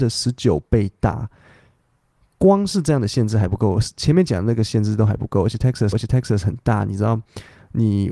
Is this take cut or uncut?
cut